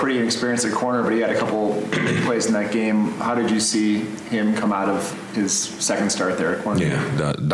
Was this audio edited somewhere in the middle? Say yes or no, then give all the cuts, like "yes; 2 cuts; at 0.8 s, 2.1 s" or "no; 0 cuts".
no; 0 cuts